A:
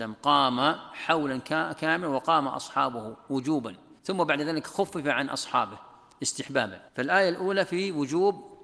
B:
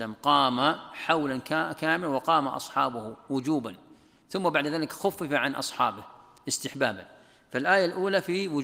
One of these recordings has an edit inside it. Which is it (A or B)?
A